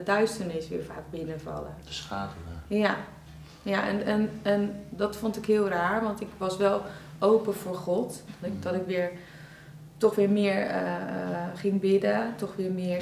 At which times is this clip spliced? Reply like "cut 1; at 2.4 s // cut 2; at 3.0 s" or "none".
none

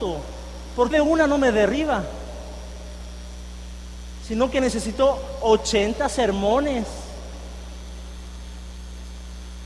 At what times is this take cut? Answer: cut 1; at 0.9 s

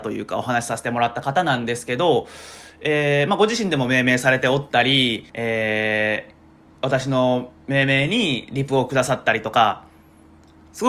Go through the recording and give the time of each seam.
cut 1; at 5.3 s

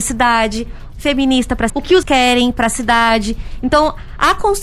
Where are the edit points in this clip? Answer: cut 1; at 0.9 s // cut 2; at 1.7 s // cut 3; at 2.0 s

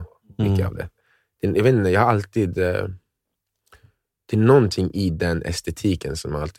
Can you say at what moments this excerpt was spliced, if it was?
none

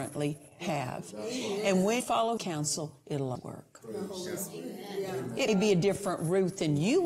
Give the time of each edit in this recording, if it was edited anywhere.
cut 1; at 2.0 s // cut 2; at 2.4 s // cut 3; at 3.3 s // cut 4; at 5.5 s

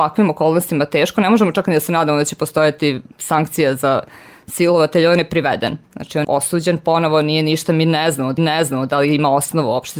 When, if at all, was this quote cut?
cut 1; at 3.1 s // cut 2; at 5.9 s // cut 3; at 6.2 s // cut 4; at 8.4 s

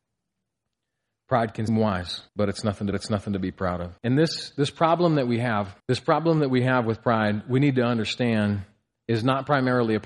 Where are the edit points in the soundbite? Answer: cut 1; at 1.7 s // cut 2; at 2.3 s // cut 3; at 2.9 s // cut 4; at 4.0 s // cut 5; at 5.8 s

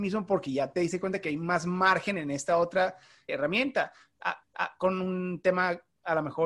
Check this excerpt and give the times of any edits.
cut 1; at 3.3 s // cut 2; at 4.4 s

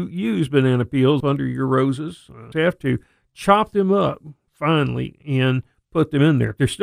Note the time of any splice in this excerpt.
cut 1; at 1.2 s // cut 2; at 2.5 s // cut 3; at 5.2 s

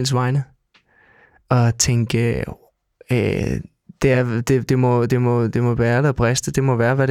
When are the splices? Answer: none

